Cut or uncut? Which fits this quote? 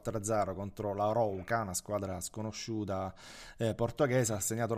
uncut